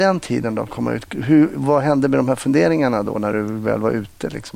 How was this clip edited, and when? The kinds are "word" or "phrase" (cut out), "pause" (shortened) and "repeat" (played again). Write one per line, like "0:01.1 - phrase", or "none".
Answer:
none